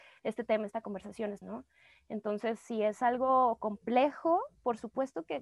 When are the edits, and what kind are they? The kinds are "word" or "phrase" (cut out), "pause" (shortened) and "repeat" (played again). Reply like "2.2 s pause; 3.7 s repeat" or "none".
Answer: 1.4 s word